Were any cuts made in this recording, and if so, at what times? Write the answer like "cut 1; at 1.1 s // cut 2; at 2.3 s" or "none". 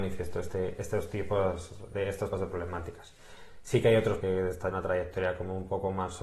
cut 1; at 2.3 s // cut 2; at 4.2 s // cut 3; at 4.7 s